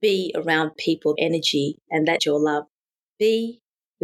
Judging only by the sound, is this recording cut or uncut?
cut